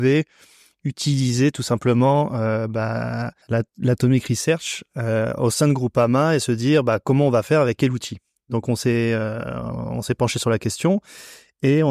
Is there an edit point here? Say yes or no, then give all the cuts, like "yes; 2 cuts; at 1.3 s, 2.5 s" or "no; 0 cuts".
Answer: yes; 1 cut; at 3.4 s